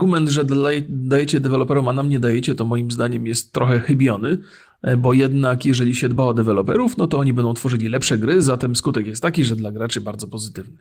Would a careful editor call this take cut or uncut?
uncut